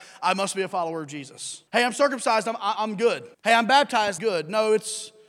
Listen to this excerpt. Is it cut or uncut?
cut